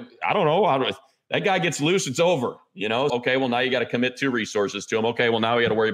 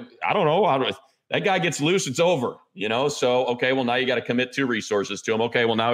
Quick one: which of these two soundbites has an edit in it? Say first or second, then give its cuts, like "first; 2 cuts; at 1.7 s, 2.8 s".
first; 1 cut; at 3.1 s